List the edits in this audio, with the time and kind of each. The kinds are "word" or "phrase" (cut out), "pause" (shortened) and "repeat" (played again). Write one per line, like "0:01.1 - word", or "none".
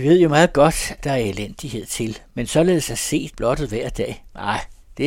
0:01.0 - word
0:03.3 - word